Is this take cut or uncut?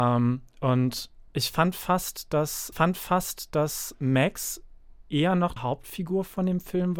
cut